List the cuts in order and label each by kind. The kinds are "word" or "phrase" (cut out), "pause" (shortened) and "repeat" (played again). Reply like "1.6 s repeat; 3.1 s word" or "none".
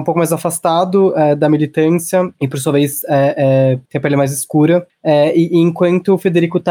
2.3 s pause; 3.8 s pause